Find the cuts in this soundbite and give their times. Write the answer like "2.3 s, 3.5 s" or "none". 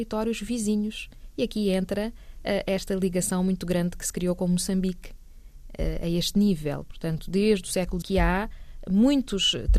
8.0 s